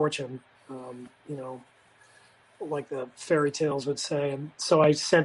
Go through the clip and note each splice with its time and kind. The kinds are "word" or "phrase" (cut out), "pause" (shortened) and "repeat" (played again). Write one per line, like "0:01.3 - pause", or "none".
none